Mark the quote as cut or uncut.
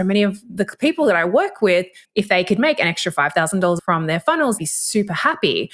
cut